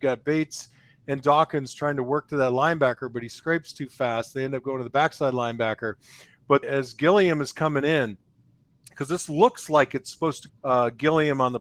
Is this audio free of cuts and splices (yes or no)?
no